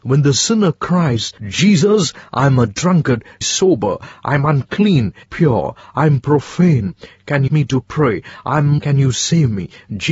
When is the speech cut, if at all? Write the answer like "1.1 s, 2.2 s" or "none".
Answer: 1.4 s, 3.4 s, 5.2 s, 7.5 s, 8.8 s